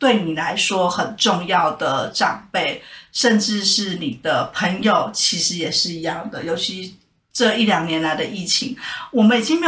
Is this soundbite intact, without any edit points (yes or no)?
yes